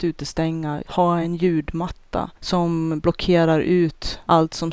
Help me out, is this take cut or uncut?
uncut